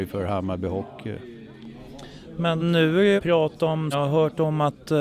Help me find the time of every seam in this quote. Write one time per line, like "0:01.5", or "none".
0:02.6
0:03.2
0:03.9